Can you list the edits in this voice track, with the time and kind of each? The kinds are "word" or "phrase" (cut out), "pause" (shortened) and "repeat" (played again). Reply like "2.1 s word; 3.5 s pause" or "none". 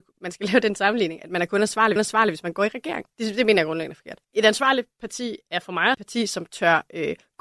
2.0 s repeat; 3.1 s pause; 4.2 s pause; 5.9 s phrase